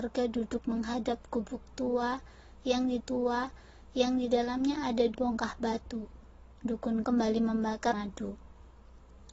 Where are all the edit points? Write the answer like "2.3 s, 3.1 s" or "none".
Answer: 3.0 s, 5.1 s, 7.0 s, 7.9 s